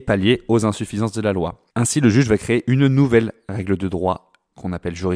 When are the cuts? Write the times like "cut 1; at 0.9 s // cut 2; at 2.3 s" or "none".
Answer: cut 1; at 1.7 s